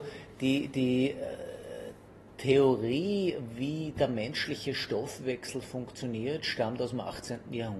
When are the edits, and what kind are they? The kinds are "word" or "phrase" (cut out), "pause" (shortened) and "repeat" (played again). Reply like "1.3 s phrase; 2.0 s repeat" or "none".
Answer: none